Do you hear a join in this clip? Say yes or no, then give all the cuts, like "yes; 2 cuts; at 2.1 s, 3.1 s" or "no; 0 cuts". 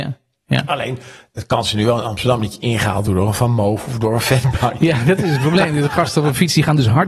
no; 0 cuts